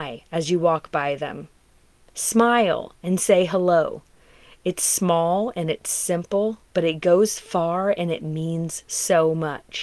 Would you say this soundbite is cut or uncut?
cut